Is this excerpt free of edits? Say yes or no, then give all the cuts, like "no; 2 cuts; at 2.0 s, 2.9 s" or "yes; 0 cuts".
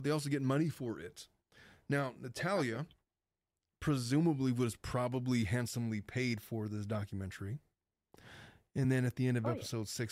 yes; 0 cuts